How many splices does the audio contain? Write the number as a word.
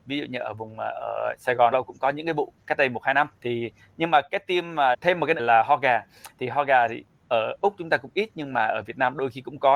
four